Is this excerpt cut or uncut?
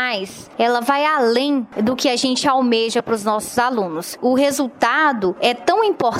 uncut